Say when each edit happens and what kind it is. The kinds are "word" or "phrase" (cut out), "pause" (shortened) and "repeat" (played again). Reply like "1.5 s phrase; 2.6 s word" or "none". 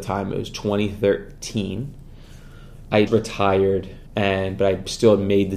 3.1 s word; 4.1 s pause

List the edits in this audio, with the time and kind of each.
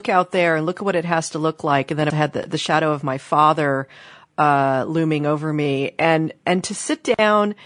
2.1 s phrase

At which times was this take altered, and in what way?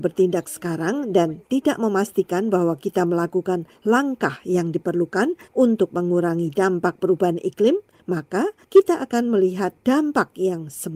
none

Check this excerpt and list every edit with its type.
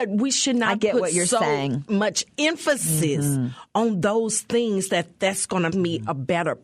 5.7 s word

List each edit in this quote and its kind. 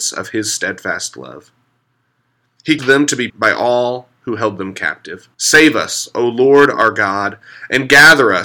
2.8 s word; 3.3 s word; 5.3 s pause

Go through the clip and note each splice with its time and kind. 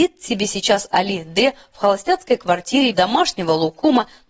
2.9 s word

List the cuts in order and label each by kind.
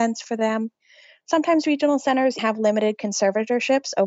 2.4 s word

